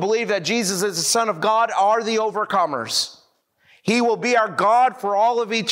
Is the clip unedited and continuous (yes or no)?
yes